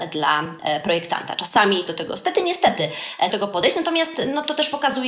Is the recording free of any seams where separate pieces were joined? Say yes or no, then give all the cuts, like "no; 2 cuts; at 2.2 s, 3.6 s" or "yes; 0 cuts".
no; 2 cuts; at 1.9 s, 3.3 s